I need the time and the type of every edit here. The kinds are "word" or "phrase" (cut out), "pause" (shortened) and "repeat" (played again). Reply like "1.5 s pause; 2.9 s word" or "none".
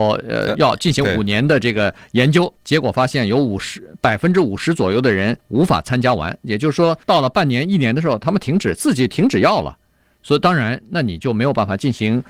2.6 s pause; 5.4 s pause; 7.0 s pause